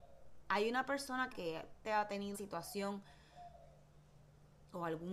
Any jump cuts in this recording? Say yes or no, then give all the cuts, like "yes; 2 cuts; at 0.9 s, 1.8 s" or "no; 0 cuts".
yes; 3 cuts; at 1.3 s, 1.8 s, 2.3 s